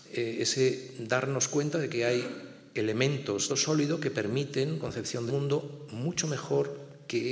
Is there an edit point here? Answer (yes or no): yes